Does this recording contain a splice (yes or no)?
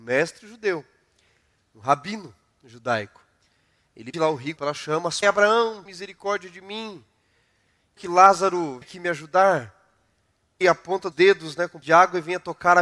yes